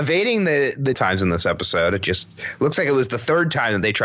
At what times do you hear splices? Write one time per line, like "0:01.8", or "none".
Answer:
0:00.9